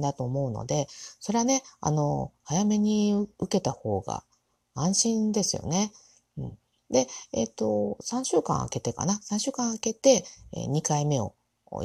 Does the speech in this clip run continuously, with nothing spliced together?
yes; 0 cuts

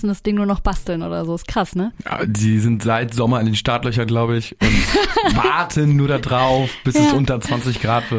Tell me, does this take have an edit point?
no; 0 cuts

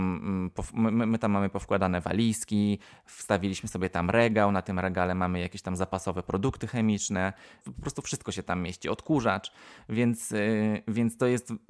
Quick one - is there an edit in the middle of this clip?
no; 0 cuts

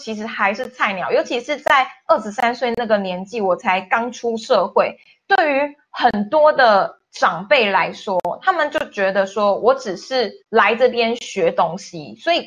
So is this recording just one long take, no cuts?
no; 1 cut; at 10.4 s

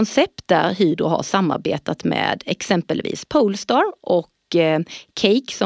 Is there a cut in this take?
no; 0 cuts

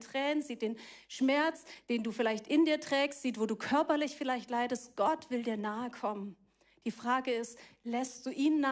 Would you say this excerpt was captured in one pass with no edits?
yes; 0 cuts

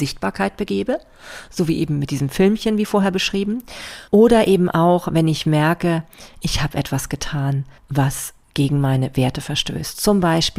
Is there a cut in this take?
yes; 2 cuts; at 4.1 s, 7.8 s

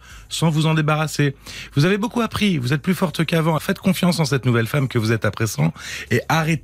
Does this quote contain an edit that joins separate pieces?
yes; 1 cut; at 3.6 s

